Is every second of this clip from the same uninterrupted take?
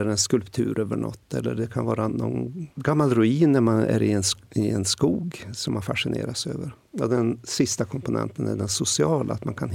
no; 2 cuts; at 2.1 s, 2.7 s

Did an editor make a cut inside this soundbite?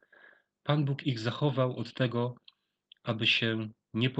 no; 0 cuts

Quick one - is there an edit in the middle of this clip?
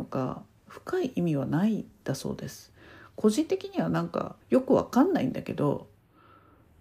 yes; 1 cut; at 4.4 s

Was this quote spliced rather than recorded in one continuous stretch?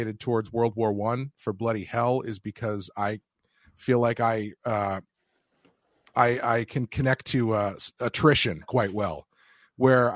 no; 0 cuts

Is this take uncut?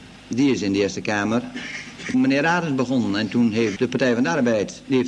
no; 2 cuts; at 2.1 s, 3.8 s

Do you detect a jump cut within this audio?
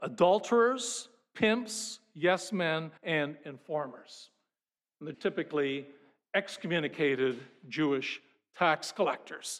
yes; 2 cuts; at 3.0 s, 5.1 s

